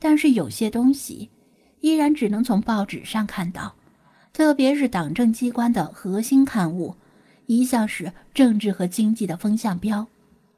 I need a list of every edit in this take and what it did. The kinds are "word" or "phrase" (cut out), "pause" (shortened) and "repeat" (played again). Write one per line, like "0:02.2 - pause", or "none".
none